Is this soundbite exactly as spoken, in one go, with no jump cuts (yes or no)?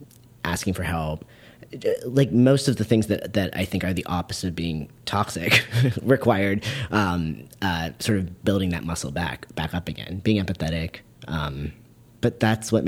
yes